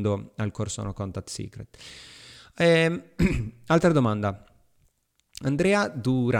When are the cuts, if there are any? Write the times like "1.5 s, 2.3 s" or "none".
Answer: none